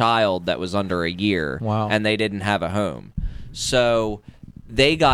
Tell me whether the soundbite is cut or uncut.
uncut